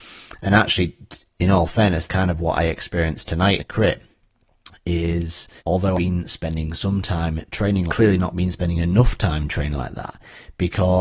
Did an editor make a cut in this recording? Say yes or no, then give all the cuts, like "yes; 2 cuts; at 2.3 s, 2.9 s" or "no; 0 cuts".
yes; 5 cuts; at 2.1 s, 3.6 s, 5.6 s, 5.9 s, 7.9 s